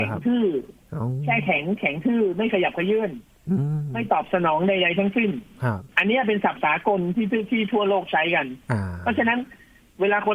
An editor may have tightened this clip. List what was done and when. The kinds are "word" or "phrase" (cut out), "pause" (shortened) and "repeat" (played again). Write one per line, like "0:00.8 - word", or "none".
0:05.9 - pause